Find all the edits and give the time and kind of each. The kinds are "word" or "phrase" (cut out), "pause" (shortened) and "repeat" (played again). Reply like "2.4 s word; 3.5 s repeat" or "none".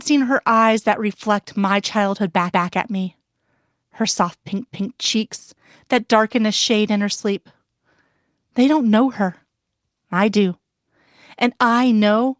2.5 s repeat; 4.7 s repeat